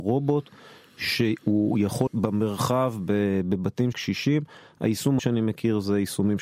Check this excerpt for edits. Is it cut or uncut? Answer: cut